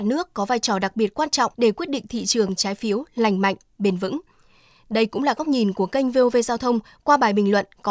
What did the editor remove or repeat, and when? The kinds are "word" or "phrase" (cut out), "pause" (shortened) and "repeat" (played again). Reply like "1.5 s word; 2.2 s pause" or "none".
1.5 s pause